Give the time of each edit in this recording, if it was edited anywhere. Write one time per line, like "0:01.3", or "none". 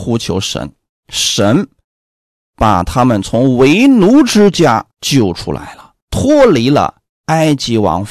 0:04.9
0:06.0